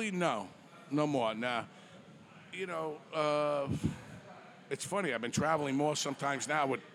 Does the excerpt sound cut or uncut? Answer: uncut